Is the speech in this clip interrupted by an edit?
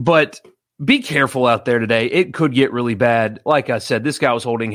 no; 0 cuts

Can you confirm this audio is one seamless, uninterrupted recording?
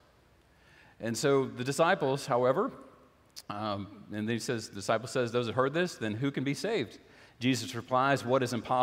yes; 0 cuts

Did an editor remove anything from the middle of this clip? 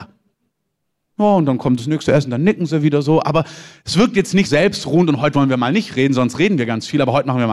yes; 1 cut; at 4.4 s

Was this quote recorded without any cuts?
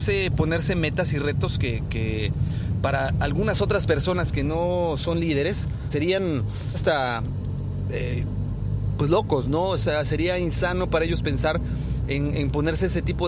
no; 2 cuts; at 5.9 s, 6.7 s

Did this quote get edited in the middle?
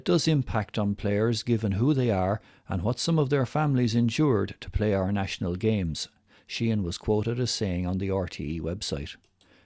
no; 0 cuts

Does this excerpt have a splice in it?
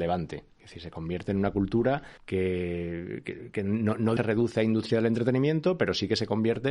yes; 2 cuts; at 2.2 s, 4.2 s

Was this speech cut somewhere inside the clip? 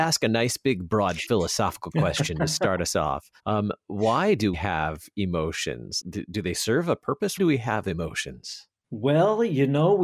yes; 5 cuts; at 3.4 s, 4.5 s, 6.0 s, 7.4 s, 8.8 s

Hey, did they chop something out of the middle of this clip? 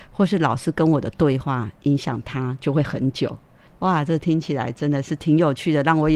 no; 0 cuts

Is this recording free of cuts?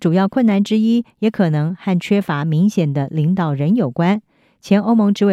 yes; 0 cuts

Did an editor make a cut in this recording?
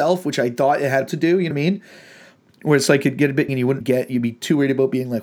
yes; 4 cuts; at 1.1 s, 1.5 s, 3.5 s, 3.8 s

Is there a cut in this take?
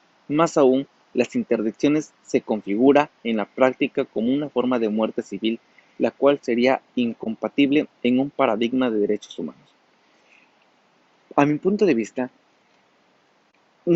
no; 0 cuts

